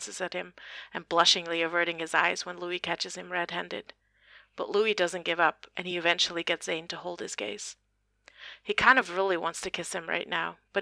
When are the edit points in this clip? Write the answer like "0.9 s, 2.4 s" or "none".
none

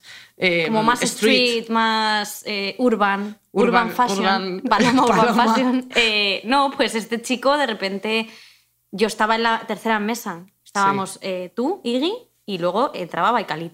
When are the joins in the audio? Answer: none

